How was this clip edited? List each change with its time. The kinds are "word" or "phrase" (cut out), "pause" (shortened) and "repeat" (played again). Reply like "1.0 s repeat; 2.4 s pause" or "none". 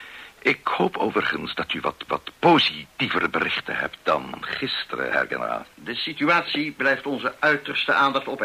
2.1 s repeat; 5.7 s pause